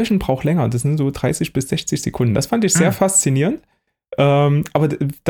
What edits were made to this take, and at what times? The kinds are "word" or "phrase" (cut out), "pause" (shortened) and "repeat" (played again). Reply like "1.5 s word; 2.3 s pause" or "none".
none